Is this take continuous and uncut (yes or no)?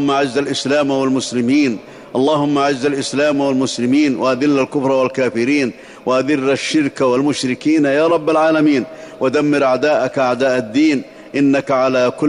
yes